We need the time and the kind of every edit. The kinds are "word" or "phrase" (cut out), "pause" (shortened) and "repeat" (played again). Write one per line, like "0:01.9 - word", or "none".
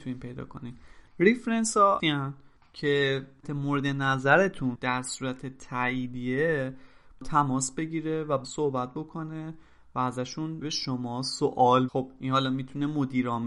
0:02.0 - word
0:03.4 - word
0:04.8 - word
0:07.2 - word
0:08.4 - word
0:10.6 - word
0:11.9 - word